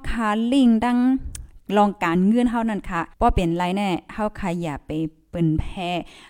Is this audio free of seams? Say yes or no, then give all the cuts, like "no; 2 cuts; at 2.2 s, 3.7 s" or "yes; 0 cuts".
no; 1 cut; at 3.1 s